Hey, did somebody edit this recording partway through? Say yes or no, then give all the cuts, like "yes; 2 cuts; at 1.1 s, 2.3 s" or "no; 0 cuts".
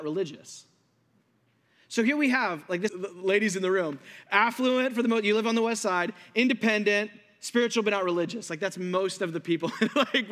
yes; 1 cut; at 2.9 s